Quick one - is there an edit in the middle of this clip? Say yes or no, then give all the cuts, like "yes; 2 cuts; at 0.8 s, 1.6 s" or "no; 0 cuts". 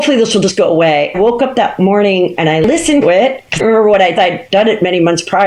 yes; 4 cuts; at 1.1 s, 3.0 s, 3.6 s, 4.2 s